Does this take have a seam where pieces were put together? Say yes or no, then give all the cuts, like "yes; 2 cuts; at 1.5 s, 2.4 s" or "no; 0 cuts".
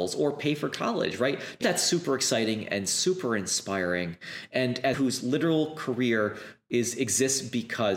yes; 2 cuts; at 1.6 s, 4.9 s